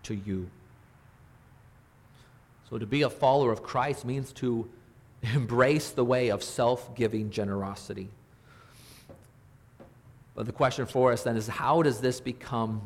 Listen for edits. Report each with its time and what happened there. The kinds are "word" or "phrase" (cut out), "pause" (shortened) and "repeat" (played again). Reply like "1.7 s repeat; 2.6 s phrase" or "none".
none